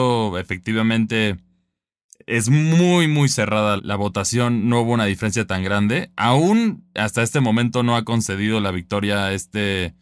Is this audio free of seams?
no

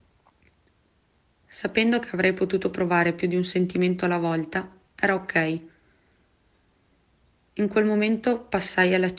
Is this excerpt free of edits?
yes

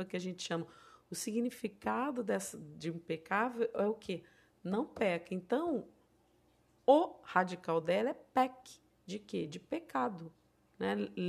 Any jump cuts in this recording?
no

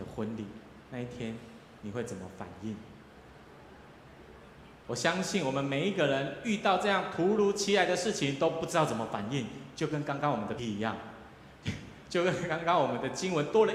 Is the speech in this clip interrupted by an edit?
yes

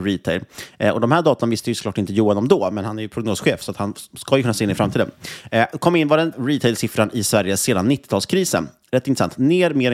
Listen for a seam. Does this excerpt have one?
yes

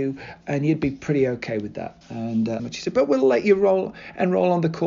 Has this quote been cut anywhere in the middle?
yes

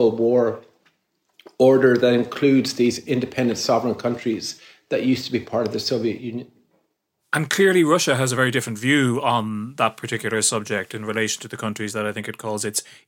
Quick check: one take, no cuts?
yes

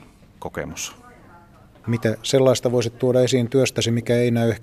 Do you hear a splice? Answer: no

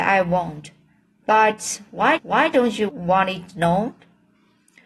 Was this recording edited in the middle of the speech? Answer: yes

